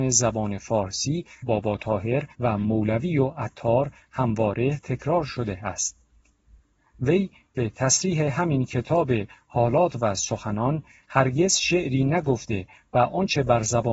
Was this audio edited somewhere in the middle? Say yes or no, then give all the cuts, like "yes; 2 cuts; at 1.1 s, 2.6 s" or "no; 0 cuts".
yes; 2 cuts; at 1.4 s, 2.3 s